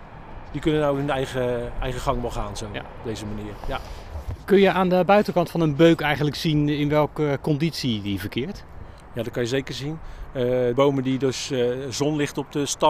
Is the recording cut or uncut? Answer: cut